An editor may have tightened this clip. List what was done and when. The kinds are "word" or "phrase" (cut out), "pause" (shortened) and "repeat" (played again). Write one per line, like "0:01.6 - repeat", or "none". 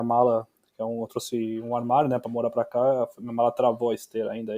none